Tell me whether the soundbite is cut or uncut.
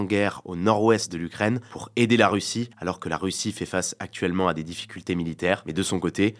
cut